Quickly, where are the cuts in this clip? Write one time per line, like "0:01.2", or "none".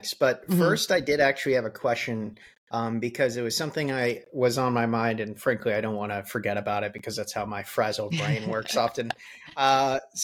none

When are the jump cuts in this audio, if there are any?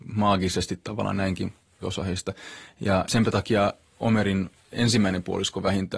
0:01.8

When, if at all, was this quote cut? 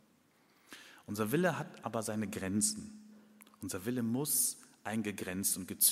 none

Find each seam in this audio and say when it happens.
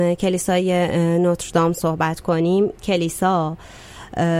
0:02.7

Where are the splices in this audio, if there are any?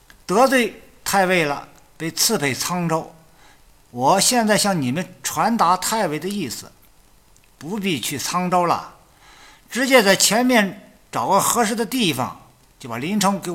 none

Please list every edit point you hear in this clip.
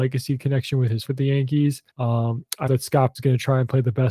0:01.1
0:01.9
0:02.7
0:03.2

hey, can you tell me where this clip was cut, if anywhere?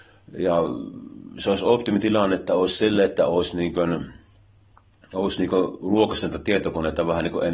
none

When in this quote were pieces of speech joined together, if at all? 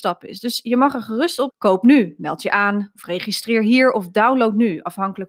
0:01.5

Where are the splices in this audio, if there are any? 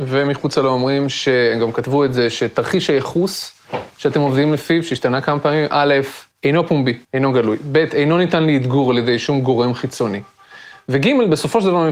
0:06.3
0:07.0

